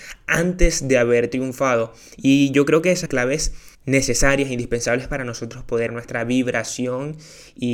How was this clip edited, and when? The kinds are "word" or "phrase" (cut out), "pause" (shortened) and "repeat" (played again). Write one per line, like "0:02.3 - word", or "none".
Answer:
0:03.1 - phrase
0:03.7 - pause
0:05.9 - word